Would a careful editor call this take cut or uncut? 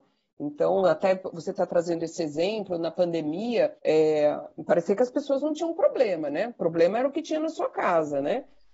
cut